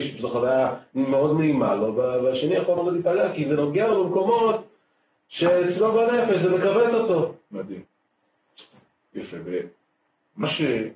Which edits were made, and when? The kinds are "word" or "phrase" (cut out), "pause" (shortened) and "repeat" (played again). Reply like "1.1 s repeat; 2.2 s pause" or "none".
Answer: none